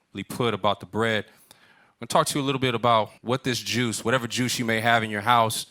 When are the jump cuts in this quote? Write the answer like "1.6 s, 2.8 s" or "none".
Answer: 3.2 s